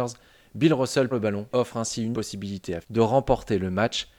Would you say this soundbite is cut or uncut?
cut